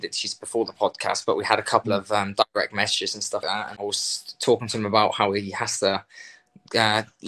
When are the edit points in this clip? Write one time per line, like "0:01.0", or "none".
0:03.4
0:03.8